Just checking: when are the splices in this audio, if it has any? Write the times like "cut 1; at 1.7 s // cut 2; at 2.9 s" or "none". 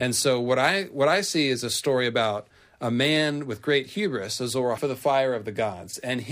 cut 1; at 4.8 s